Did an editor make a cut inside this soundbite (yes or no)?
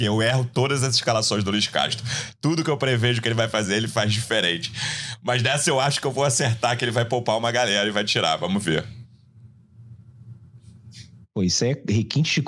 no